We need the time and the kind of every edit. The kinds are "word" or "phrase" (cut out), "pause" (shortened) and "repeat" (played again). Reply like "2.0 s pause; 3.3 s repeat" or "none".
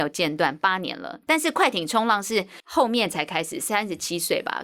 2.6 s pause